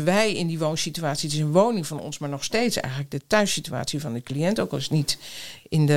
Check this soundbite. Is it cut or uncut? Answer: uncut